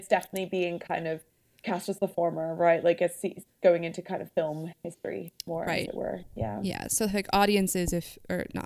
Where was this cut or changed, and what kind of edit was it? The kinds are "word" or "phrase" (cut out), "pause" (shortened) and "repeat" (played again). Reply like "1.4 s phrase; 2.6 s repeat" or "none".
1.3 s pause